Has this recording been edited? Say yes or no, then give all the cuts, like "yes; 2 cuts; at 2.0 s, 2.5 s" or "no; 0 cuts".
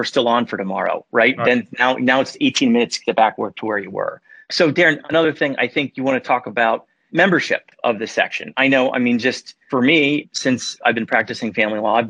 no; 0 cuts